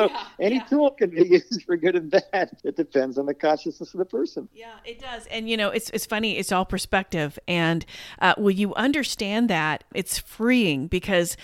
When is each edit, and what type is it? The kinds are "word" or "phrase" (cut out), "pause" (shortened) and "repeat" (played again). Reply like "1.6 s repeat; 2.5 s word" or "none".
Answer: 2.6 s pause